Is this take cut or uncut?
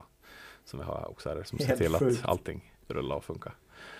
cut